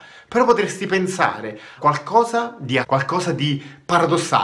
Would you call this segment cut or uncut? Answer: cut